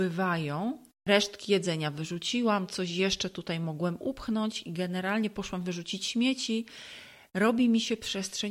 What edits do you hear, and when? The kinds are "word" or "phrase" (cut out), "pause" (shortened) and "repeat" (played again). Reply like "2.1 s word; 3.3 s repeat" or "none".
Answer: none